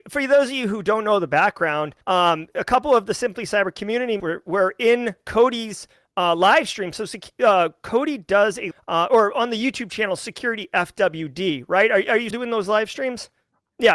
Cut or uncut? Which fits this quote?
cut